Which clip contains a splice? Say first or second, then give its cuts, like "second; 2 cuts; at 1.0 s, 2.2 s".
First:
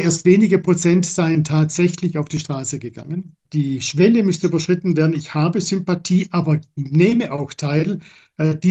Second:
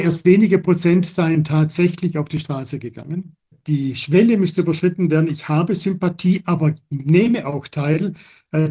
first; 1 cut; at 3.4 s